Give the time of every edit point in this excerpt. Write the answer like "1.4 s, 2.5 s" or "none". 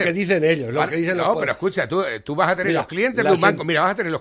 none